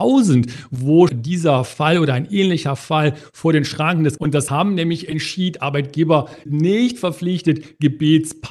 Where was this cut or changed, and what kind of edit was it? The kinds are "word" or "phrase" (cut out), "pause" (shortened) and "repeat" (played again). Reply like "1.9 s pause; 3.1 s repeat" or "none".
1.1 s word; 4.2 s phrase; 4.5 s word; 6.5 s word